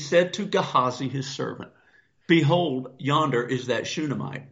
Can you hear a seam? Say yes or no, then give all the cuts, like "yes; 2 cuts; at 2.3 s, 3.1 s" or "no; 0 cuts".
no; 0 cuts